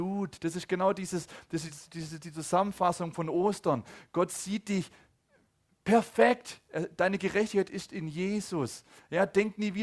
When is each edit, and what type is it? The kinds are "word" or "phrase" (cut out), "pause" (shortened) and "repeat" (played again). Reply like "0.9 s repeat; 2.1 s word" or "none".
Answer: none